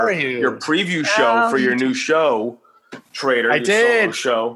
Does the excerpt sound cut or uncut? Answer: cut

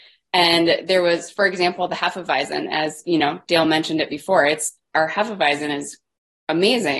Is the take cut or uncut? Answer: uncut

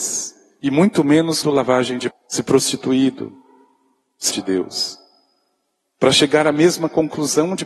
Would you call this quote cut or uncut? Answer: cut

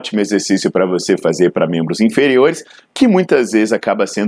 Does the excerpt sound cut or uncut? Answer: uncut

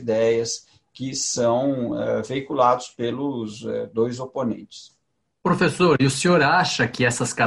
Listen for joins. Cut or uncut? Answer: uncut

